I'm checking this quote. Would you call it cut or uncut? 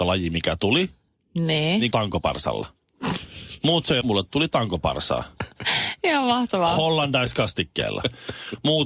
cut